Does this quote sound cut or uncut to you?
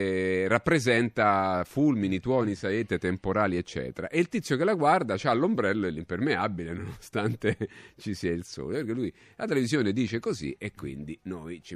uncut